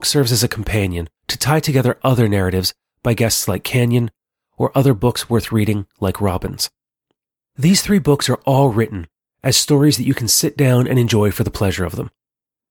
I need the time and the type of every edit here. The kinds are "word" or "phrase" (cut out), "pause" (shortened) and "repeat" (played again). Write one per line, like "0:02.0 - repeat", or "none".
0:01.2 - pause
0:07.3 - pause